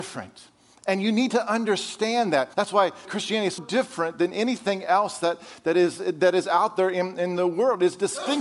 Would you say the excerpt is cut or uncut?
cut